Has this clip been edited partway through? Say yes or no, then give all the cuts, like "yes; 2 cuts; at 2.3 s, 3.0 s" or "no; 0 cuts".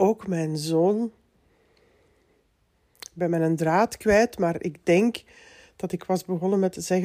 no; 0 cuts